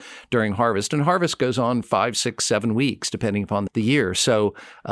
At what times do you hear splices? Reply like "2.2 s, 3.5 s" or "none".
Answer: 1.8 s, 3.7 s